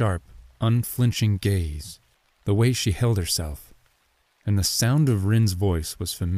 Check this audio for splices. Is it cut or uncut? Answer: cut